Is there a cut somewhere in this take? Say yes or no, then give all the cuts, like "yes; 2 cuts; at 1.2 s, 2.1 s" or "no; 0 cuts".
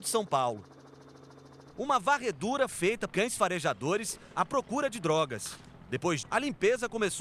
yes; 4 cuts; at 1.7 s, 2.7 s, 3.1 s, 6.2 s